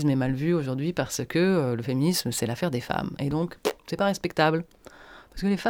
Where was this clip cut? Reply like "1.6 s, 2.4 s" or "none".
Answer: none